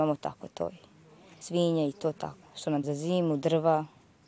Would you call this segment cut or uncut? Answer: cut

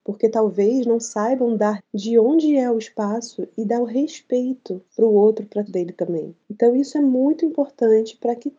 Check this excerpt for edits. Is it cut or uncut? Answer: cut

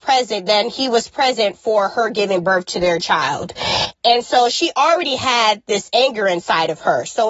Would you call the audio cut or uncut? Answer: uncut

